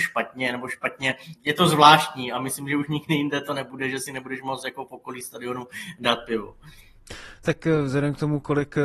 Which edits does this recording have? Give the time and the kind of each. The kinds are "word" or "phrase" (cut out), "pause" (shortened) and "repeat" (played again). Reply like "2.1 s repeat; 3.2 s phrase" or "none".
1.4 s word